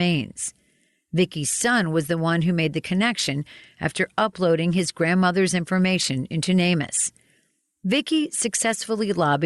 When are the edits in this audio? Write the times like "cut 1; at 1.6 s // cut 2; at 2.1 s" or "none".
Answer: none